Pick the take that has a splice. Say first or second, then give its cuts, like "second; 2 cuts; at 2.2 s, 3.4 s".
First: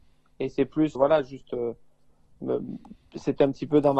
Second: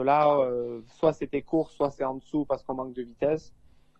first; 1 cut; at 1.0 s